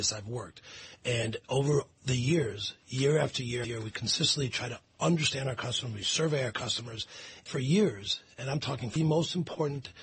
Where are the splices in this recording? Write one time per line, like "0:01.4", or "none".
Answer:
0:03.6
0:07.5
0:09.0

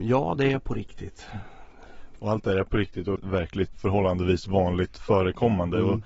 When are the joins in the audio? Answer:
0:03.2
0:03.7

